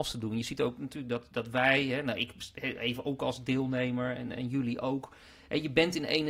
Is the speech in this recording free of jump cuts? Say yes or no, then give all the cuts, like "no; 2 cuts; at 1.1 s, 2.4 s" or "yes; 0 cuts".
yes; 0 cuts